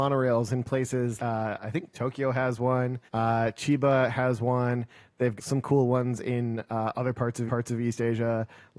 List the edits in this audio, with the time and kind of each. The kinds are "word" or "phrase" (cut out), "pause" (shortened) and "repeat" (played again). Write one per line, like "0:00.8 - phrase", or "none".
0:01.2 - word
0:03.1 - pause
0:05.4 - word
0:07.5 - repeat